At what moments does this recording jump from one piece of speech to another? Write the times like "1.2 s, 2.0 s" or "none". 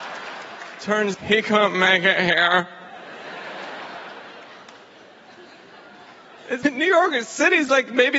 1.1 s, 6.6 s